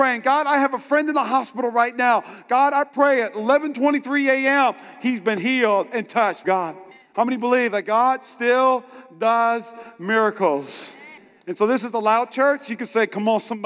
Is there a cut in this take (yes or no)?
yes